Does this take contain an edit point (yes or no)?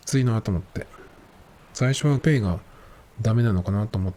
yes